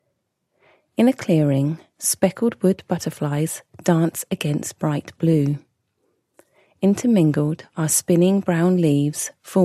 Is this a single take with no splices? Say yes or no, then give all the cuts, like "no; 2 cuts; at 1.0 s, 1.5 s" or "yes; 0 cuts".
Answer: yes; 0 cuts